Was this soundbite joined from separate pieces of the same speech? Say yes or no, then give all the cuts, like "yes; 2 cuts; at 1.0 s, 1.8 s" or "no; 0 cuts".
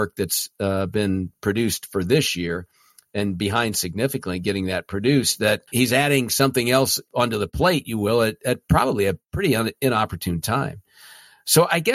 yes; 1 cut; at 5.7 s